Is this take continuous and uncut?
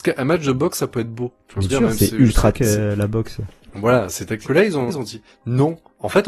no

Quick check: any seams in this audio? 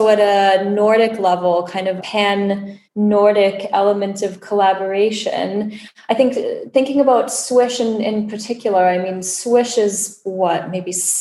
yes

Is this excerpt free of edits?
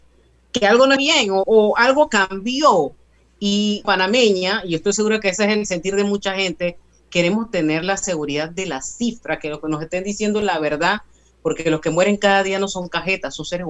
no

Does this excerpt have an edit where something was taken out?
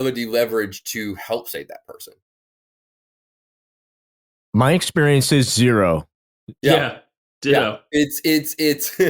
no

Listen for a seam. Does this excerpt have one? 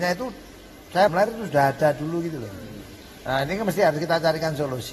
yes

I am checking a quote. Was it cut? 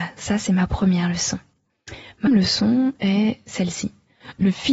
yes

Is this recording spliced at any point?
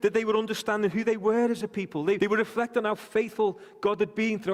yes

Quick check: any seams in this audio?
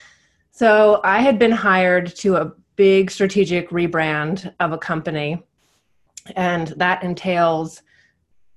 no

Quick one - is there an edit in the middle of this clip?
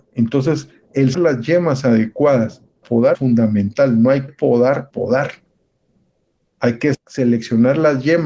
yes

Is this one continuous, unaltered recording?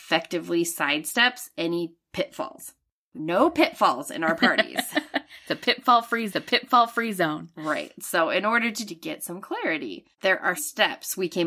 no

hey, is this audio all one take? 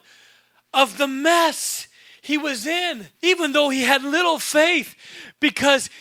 no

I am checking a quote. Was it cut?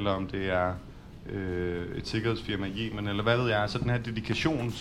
no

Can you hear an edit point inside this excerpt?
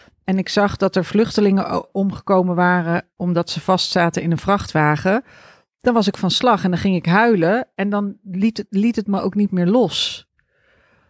no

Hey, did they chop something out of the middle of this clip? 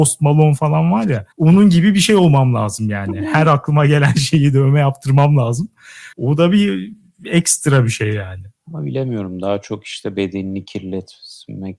yes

